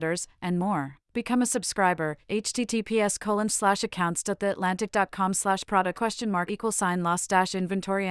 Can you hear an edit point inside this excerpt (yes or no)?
yes